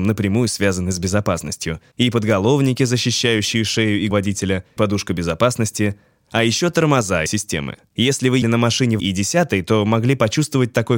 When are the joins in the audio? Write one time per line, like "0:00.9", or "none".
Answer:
0:04.1
0:04.8
0:07.3
0:08.4
0:09.0